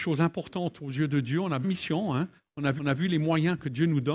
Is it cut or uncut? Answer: cut